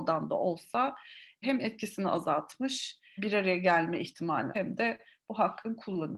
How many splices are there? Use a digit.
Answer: 3